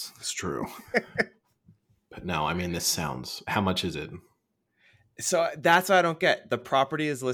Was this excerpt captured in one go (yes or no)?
yes